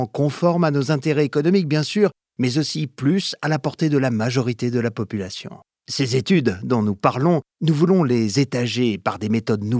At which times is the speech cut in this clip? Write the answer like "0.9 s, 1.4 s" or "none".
5.7 s, 7.5 s